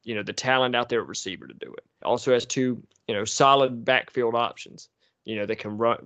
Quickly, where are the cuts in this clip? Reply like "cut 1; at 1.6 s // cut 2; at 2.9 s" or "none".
none